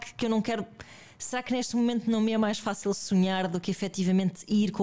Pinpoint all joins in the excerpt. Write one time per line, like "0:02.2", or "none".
0:02.9